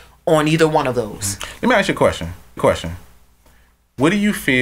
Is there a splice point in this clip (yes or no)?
yes